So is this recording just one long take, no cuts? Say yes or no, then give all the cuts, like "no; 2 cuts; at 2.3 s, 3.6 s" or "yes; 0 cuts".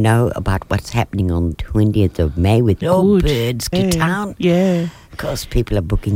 no; 3 cuts; at 1.5 s, 2.8 s, 3.7 s